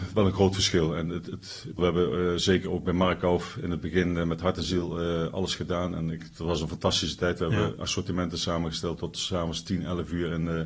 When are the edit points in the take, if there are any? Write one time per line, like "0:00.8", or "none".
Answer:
0:01.8